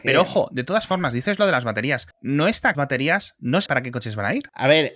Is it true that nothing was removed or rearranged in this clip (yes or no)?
no